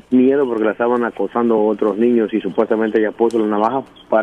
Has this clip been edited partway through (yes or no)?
no